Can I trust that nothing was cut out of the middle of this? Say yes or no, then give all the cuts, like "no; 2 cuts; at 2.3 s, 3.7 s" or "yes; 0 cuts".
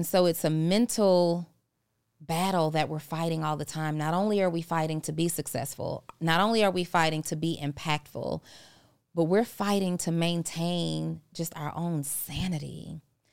yes; 0 cuts